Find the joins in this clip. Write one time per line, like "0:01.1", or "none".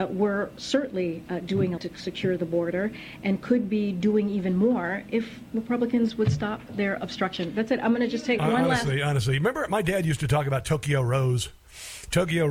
0:01.8